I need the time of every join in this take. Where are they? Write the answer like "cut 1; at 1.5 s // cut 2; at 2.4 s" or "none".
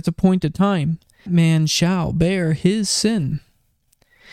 cut 1; at 1.3 s

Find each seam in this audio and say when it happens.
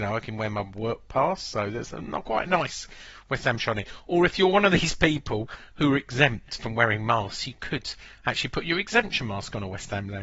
none

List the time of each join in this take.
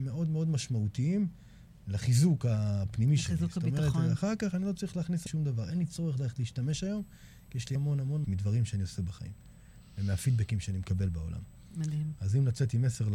cut 1; at 5.3 s // cut 2; at 7.8 s // cut 3; at 8.2 s

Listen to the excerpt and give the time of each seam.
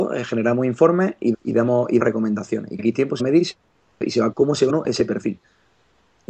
cut 1; at 1.3 s // cut 2; at 2.0 s // cut 3; at 2.8 s // cut 4; at 3.2 s // cut 5; at 4.3 s // cut 6; at 4.7 s

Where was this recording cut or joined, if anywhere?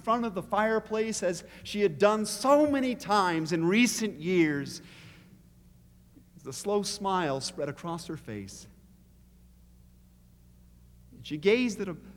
none

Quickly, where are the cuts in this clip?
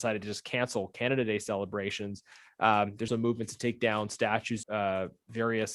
cut 1; at 3.1 s // cut 2; at 4.6 s

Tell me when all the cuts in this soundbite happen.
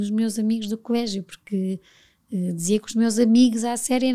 none

